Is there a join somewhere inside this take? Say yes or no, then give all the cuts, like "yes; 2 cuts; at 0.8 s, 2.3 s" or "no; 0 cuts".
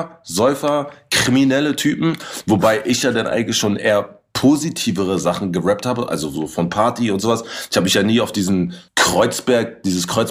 yes; 1 cut; at 8.9 s